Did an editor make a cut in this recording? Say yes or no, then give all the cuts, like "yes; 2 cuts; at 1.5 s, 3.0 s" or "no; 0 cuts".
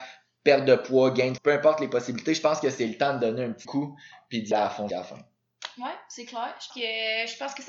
yes; 5 cuts; at 1.4 s, 3.6 s, 4.5 s, 4.9 s, 6.7 s